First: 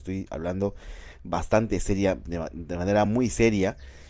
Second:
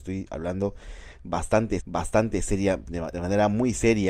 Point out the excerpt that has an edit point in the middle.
second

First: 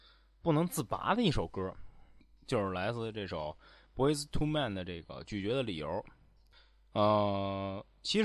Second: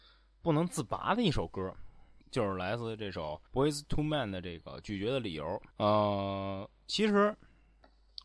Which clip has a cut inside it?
second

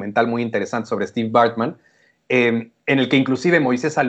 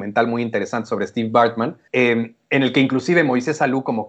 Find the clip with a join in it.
second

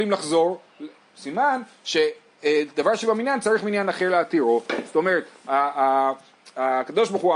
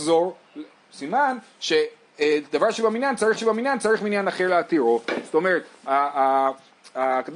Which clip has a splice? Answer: second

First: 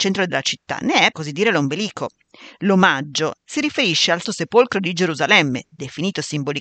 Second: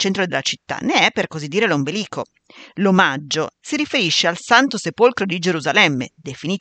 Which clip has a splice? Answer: first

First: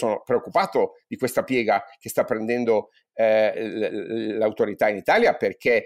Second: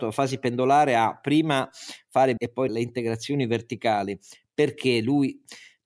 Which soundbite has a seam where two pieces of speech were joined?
second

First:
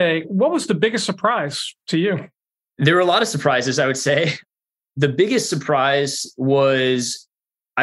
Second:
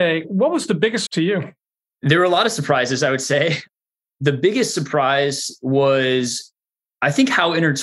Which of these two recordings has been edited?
second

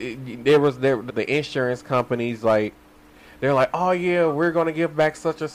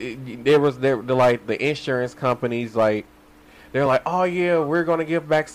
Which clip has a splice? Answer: first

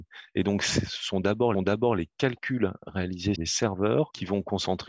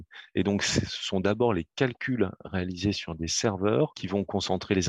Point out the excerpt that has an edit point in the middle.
first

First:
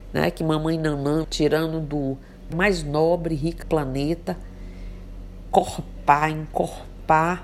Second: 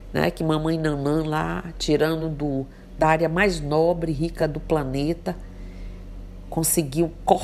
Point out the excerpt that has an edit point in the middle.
first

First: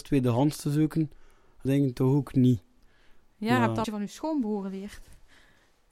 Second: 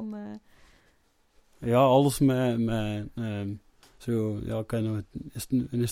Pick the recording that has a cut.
first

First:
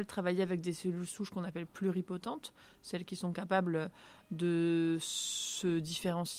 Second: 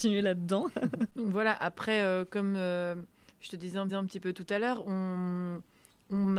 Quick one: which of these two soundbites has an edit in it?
second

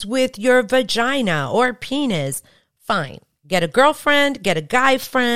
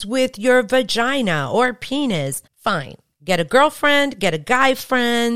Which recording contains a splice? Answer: second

